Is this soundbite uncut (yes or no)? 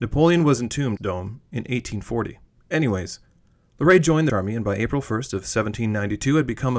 no